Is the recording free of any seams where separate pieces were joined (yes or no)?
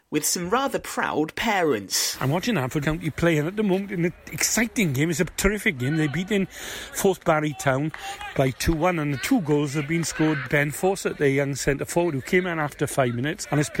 no